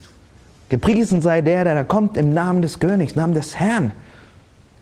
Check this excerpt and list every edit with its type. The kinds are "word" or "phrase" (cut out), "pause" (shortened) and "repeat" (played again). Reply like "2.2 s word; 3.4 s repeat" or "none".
none